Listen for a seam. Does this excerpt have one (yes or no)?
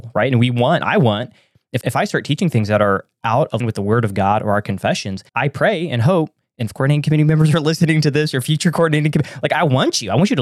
yes